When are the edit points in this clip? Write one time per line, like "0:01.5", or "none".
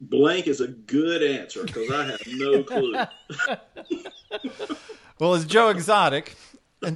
none